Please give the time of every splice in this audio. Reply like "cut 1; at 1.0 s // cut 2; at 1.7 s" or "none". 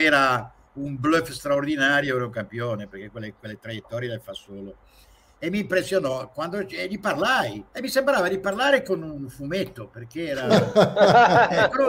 cut 1; at 7.7 s

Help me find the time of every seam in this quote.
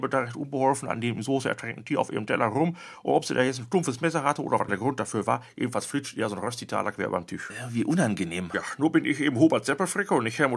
cut 1; at 4.7 s

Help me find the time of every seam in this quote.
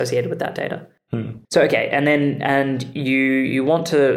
cut 1; at 1.4 s

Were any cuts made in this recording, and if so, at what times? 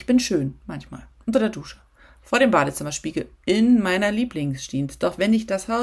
none

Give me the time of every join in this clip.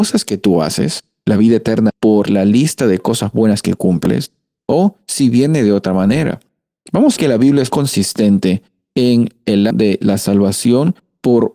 cut 1; at 1.9 s // cut 2; at 7.2 s // cut 3; at 7.7 s // cut 4; at 9.7 s

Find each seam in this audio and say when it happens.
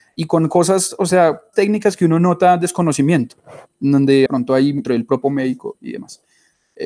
cut 1; at 1.5 s // cut 2; at 4.3 s // cut 3; at 4.8 s // cut 4; at 5.2 s

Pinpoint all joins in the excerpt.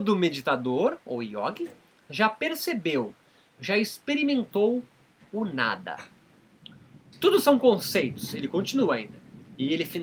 none

